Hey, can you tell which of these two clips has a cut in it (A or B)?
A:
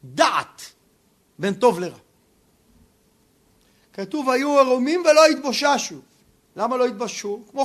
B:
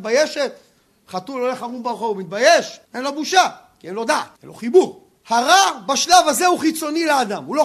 B